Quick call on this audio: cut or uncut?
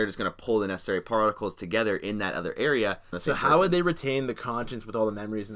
cut